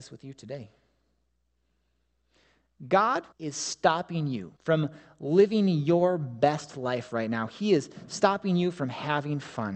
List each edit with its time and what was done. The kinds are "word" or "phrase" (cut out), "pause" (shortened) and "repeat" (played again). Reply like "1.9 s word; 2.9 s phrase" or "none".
3.3 s pause; 4.6 s pause